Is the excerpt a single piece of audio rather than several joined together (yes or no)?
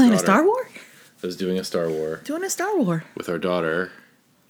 yes